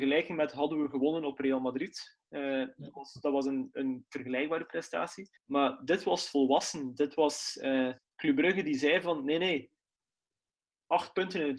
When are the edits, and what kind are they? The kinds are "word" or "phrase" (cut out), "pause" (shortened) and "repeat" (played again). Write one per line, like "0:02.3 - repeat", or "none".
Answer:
0:05.4 - pause
0:08.0 - pause
0:10.3 - pause